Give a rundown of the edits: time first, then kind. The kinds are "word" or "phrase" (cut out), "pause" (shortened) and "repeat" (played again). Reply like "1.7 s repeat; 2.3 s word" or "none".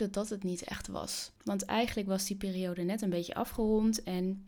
1.4 s pause